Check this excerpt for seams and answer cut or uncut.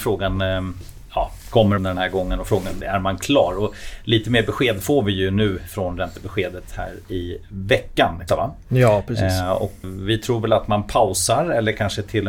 cut